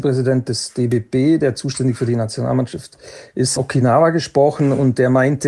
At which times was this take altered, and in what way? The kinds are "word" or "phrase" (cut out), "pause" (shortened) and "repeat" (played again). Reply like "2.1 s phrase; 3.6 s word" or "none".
3.6 s word